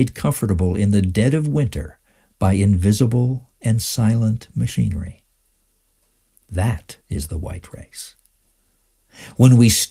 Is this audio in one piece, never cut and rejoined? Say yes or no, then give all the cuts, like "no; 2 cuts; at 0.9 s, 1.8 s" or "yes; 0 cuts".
no; 1 cut; at 7.0 s